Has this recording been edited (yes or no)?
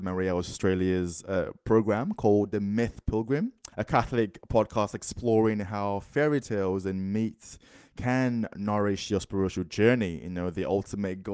yes